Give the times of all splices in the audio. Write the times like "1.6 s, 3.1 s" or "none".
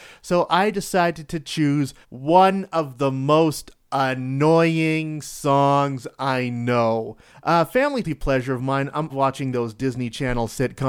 2.0 s, 7.3 s, 8.0 s, 9.1 s